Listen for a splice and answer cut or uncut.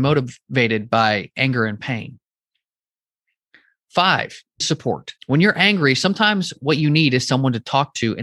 cut